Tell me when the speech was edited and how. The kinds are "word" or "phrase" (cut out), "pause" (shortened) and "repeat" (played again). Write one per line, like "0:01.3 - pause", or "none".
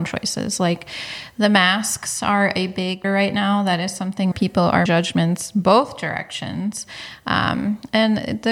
0:03.0 - word
0:04.3 - word
0:04.9 - word